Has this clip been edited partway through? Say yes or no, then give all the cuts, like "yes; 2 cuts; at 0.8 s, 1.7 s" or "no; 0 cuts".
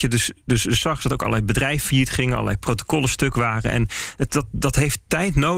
no; 0 cuts